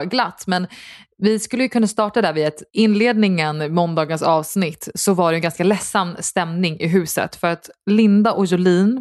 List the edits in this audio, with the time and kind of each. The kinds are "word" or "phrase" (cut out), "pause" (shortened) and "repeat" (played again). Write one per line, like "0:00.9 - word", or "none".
0:02.7 - pause